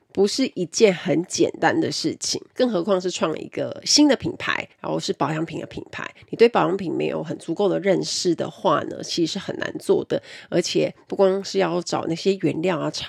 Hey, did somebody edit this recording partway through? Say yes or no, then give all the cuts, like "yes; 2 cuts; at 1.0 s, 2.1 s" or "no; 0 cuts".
yes; 2 cuts; at 2.5 s, 4.7 s